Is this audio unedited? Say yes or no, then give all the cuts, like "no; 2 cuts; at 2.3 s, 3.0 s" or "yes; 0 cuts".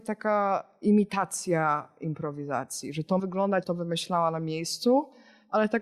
no; 2 cuts; at 3.2 s, 3.6 s